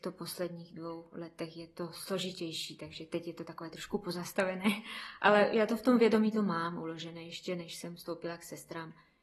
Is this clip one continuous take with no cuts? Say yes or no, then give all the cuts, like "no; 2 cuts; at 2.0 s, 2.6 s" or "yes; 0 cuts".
yes; 0 cuts